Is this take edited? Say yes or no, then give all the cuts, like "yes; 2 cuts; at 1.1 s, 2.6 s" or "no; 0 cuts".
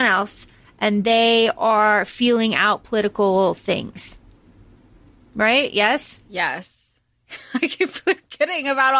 no; 0 cuts